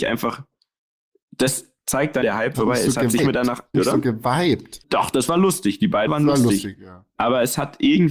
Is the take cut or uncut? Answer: cut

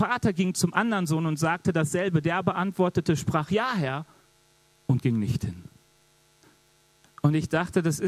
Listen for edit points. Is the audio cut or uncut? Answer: uncut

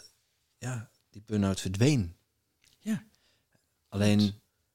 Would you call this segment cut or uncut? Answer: uncut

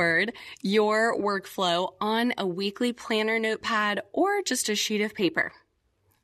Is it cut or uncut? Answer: uncut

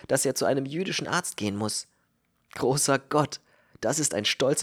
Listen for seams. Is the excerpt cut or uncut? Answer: uncut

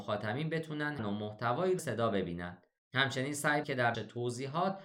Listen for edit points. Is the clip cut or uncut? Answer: cut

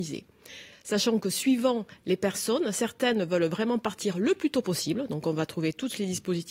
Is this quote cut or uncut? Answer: uncut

